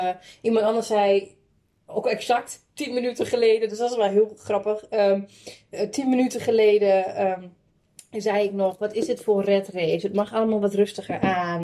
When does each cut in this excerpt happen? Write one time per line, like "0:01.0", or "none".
none